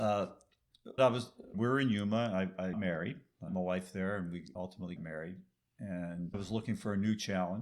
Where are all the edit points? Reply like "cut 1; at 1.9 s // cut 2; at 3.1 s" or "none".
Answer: cut 1; at 1.0 s // cut 2; at 1.5 s // cut 3; at 2.7 s // cut 4; at 3.5 s // cut 5; at 4.6 s // cut 6; at 5.0 s // cut 7; at 6.3 s